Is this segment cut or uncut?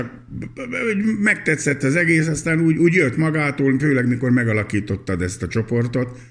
uncut